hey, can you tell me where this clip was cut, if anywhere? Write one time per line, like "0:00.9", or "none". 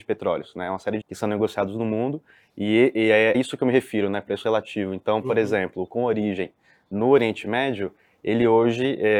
0:01.0
0:03.3
0:05.9

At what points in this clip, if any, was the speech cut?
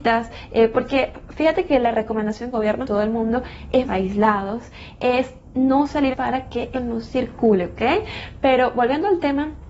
0:02.5
0:02.8
0:03.8
0:06.1
0:06.7

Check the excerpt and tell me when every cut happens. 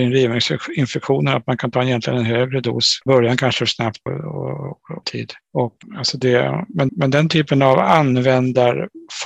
0:03.1
0:04.1
0:05.0
0:06.9

